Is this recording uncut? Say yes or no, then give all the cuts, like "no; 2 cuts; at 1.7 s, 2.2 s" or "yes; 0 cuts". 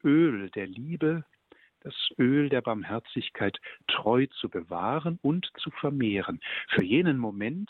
yes; 0 cuts